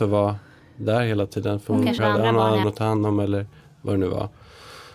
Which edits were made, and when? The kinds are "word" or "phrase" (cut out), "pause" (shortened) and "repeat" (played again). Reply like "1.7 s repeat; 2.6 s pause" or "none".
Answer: 2.0 s word; 2.6 s phrase

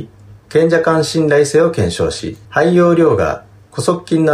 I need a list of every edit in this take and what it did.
2.4 s pause

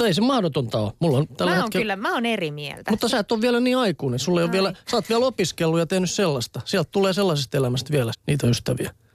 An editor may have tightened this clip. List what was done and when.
8.1 s word

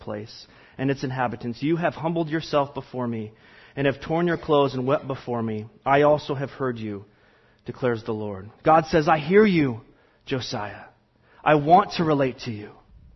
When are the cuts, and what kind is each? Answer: none

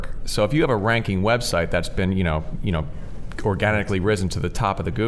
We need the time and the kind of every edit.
2.6 s word

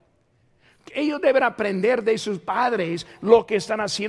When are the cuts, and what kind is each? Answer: none

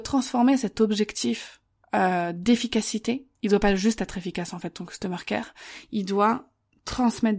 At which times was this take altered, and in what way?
1.8 s pause; 3.3 s pause

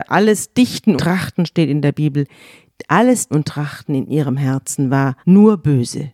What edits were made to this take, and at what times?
1.0 s word; 3.3 s word; 5.2 s pause

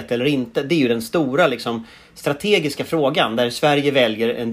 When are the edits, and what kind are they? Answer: none

